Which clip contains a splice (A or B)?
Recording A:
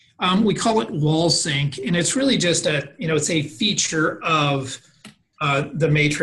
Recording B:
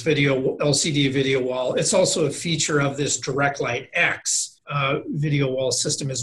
B